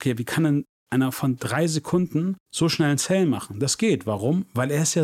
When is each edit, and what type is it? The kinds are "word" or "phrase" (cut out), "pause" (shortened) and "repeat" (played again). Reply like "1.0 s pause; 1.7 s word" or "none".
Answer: 2.4 s pause